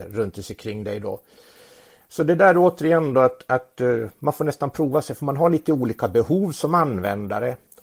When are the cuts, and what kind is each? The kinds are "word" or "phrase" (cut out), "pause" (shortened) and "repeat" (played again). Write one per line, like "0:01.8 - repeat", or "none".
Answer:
none